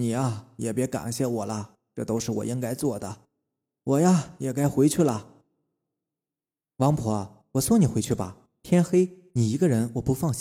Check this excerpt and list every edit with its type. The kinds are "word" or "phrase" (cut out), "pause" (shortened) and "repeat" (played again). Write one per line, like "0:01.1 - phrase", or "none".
none